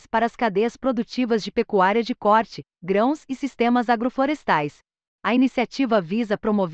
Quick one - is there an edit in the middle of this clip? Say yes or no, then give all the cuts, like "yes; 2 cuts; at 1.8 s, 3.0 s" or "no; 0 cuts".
no; 0 cuts